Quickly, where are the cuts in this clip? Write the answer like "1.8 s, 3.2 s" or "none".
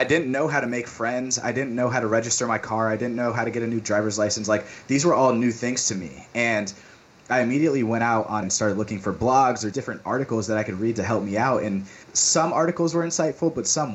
8.4 s, 9.7 s, 12.0 s